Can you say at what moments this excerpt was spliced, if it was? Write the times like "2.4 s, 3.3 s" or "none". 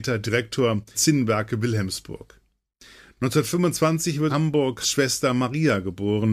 0.9 s, 4.3 s, 4.8 s